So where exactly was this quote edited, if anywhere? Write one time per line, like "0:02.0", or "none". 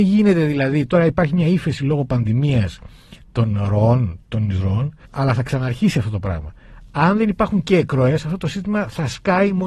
0:05.0